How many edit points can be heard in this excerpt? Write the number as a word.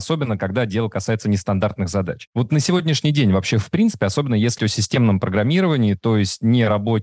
one